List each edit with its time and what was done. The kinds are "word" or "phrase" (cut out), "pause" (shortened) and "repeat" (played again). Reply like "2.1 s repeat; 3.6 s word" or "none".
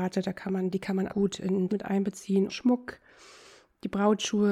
1.1 s word; 1.7 s word; 2.5 s word